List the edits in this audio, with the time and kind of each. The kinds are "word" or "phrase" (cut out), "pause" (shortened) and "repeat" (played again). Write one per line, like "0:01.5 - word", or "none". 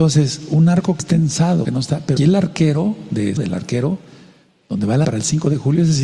0:01.0 - word
0:01.6 - word
0:02.2 - word
0:03.4 - word
0:05.0 - word